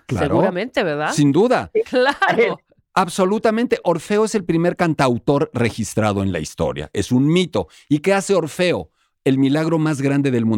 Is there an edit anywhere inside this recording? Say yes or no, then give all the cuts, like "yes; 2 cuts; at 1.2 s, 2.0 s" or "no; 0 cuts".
no; 0 cuts